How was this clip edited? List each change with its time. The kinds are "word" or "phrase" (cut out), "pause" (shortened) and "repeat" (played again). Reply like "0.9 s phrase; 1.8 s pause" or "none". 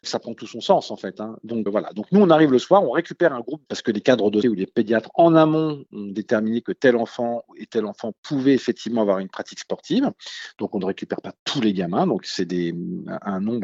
1.7 s word; 3.6 s word; 4.4 s word